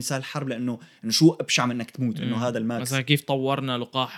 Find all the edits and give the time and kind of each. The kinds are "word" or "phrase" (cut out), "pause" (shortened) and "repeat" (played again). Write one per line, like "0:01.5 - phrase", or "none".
none